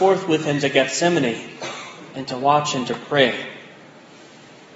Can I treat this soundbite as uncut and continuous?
yes; 0 cuts

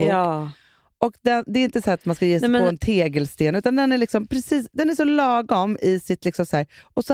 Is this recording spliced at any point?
no; 0 cuts

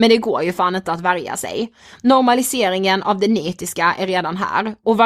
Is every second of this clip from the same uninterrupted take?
yes; 0 cuts

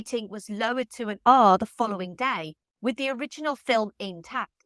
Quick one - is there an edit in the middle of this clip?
no; 0 cuts

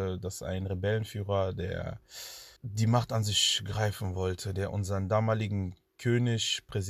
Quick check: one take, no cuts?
no; 1 cut; at 2.6 s

